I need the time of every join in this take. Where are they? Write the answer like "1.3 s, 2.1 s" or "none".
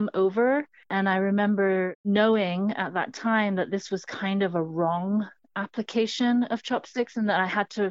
none